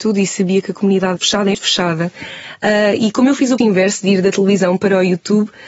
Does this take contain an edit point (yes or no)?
yes